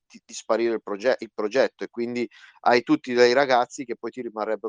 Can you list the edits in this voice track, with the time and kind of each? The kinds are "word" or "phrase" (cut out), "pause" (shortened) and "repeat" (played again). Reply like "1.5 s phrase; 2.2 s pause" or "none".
none